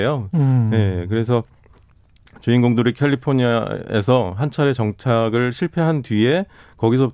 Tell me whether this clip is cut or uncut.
uncut